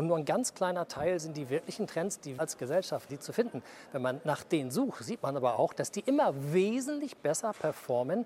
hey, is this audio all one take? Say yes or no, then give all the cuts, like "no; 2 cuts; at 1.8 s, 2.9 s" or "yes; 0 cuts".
no; 2 cuts; at 2.4 s, 3.1 s